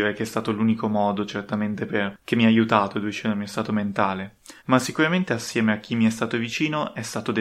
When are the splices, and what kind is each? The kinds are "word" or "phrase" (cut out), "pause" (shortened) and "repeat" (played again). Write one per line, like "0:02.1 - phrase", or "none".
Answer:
0:04.6 - pause